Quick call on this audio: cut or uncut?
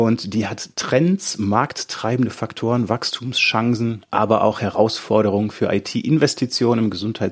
uncut